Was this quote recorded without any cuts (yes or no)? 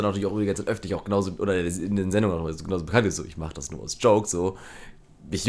yes